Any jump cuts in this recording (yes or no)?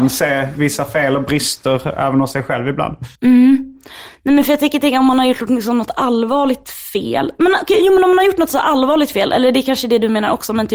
yes